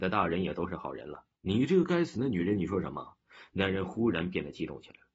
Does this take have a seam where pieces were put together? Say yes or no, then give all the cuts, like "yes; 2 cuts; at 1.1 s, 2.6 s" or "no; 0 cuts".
yes; 1 cut; at 1.4 s